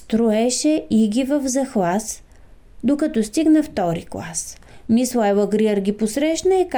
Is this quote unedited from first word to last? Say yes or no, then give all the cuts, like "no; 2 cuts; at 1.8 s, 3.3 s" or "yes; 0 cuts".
yes; 0 cuts